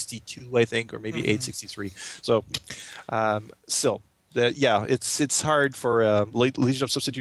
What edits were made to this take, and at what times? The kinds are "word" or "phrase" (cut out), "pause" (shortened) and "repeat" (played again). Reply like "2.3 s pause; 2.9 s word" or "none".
none